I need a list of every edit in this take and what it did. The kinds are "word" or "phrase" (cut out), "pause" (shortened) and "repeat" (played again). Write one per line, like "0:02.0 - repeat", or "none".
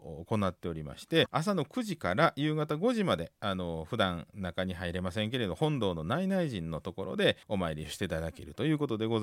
0:01.3 - phrase
0:07.4 - pause